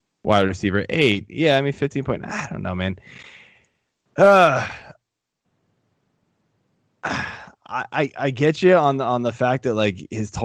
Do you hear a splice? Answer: no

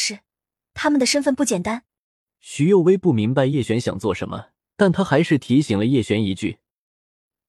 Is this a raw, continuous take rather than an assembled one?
no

